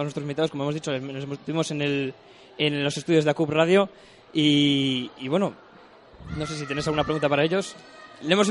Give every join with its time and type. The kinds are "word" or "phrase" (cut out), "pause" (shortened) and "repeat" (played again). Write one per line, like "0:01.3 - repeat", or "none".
none